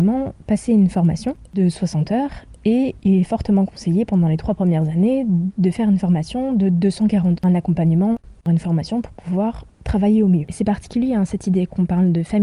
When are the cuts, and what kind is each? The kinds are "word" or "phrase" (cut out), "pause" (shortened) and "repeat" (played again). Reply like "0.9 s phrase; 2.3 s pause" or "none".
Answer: 7.4 s phrase